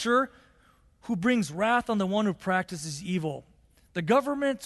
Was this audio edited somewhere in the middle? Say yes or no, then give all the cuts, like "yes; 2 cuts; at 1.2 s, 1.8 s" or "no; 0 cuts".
no; 0 cuts